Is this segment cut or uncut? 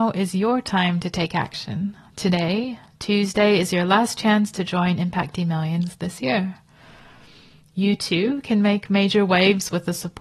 uncut